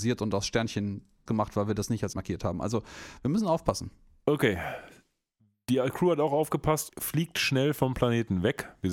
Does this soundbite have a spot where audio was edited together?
yes; 3 cuts; at 1.3 s, 2.1 s, 6.9 s

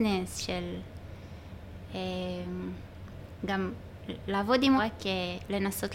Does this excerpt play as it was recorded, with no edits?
no; 1 cut; at 4.8 s

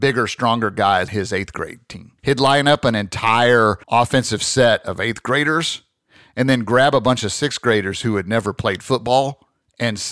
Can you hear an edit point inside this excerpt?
yes; 3 cuts; at 1.1 s, 2.2 s, 3.8 s

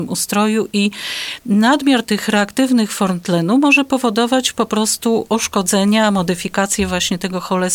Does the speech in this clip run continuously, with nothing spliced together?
yes; 0 cuts

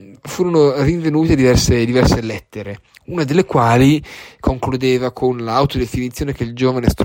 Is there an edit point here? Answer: no; 0 cuts

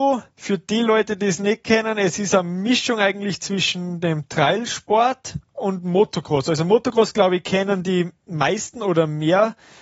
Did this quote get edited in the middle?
no; 0 cuts

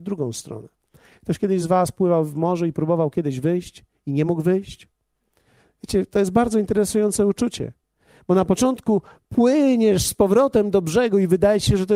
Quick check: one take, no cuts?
yes; 0 cuts

